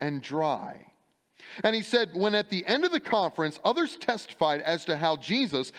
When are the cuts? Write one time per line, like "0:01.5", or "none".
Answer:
none